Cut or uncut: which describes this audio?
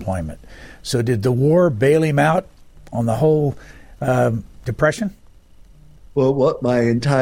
uncut